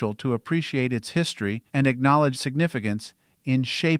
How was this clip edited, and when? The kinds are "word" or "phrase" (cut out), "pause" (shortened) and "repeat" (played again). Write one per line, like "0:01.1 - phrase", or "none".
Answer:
0:01.7 - pause
0:02.3 - word

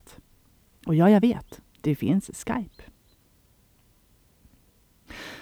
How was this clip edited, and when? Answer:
none

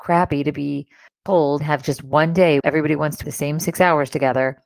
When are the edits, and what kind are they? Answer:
0:01.6 - word
0:02.6 - word
0:03.2 - word

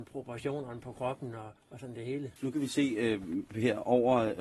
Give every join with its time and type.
0:01.6 - pause
0:02.4 - pause

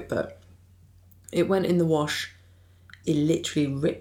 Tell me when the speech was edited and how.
0:03.0 - word

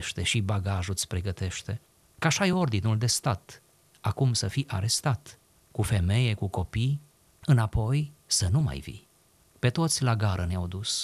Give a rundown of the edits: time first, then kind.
none

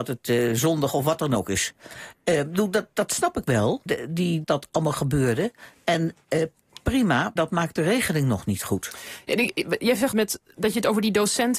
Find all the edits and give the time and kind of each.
0:03.9 - word
0:04.4 - word
0:07.4 - word
0:10.1 - phrase

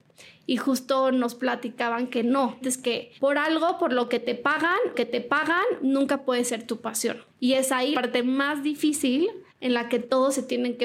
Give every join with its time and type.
0:02.6 - word
0:03.2 - pause
0:04.9 - repeat
0:07.3 - pause
0:07.9 - word
0:09.5 - pause

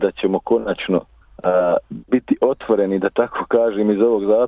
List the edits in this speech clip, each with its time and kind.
0:01.2 - pause

